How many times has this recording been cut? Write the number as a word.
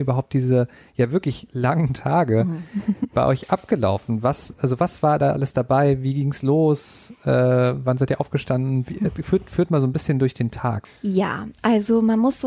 one